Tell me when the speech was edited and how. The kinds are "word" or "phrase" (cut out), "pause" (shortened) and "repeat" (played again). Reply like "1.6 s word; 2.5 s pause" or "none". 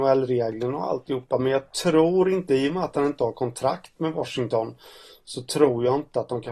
none